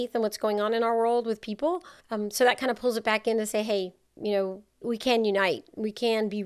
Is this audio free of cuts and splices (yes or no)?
no